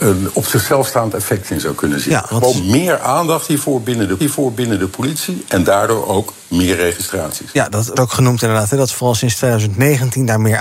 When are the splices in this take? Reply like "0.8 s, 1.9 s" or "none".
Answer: 4.2 s, 8.0 s